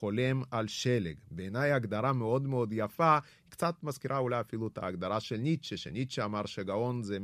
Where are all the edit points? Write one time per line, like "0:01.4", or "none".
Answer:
none